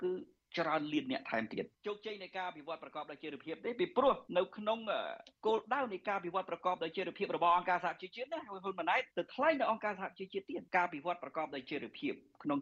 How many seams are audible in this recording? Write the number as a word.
five